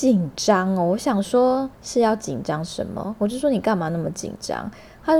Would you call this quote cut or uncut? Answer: cut